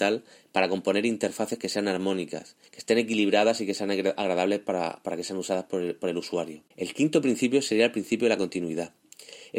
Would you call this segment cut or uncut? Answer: cut